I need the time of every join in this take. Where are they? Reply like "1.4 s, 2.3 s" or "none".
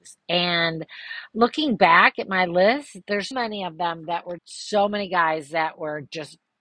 3.3 s, 4.4 s